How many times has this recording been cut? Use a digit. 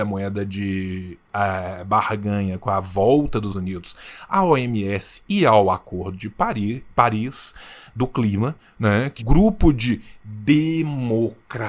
2